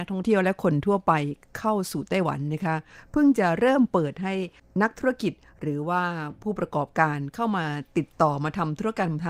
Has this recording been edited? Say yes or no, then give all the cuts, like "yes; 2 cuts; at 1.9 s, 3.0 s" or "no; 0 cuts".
no; 0 cuts